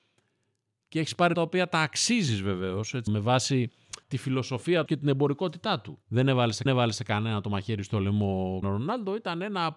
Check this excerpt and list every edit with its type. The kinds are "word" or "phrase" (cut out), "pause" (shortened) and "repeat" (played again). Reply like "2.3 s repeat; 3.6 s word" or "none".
1.3 s word; 3.1 s phrase; 4.0 s pause; 4.9 s phrase; 6.0 s pause; 6.7 s repeat; 8.6 s word